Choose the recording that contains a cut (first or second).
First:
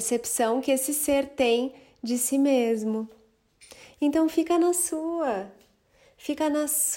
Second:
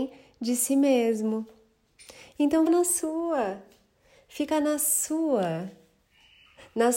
second